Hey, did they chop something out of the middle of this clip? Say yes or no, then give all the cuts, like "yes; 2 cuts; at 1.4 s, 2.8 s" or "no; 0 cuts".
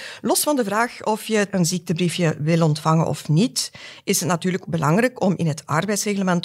yes; 1 cut; at 4.7 s